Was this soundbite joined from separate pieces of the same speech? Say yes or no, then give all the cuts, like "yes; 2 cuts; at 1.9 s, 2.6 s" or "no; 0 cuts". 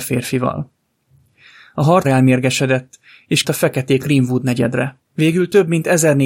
yes; 4 cuts; at 2.0 s, 3.4 s, 4.0 s, 5.1 s